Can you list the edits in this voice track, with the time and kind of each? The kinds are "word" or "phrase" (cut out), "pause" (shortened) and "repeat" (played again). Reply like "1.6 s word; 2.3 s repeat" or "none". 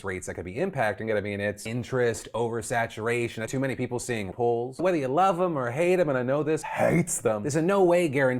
1.7 s word; 3.5 s word; 4.3 s word; 4.8 s word; 6.6 s word